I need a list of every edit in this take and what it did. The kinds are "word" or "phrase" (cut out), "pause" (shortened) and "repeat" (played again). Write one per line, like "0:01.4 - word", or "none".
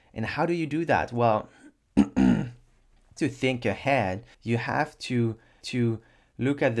0:03.2 - word
0:04.3 - pause
0:05.6 - repeat